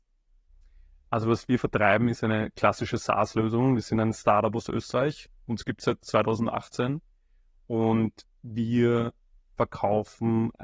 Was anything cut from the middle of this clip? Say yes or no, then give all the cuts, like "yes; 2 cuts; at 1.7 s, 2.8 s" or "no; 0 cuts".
no; 0 cuts